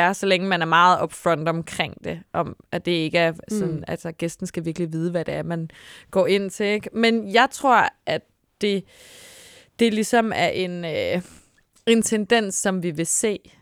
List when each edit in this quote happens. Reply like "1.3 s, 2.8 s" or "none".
none